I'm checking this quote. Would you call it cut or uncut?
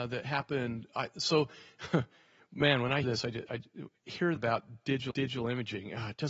cut